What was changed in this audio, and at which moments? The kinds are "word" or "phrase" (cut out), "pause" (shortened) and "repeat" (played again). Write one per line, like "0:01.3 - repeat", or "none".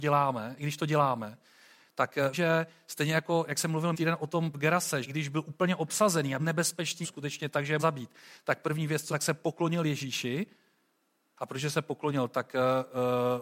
0:02.3 - word
0:03.9 - word
0:04.5 - word
0:05.0 - word
0:06.4 - word
0:07.0 - word
0:07.8 - word
0:09.1 - word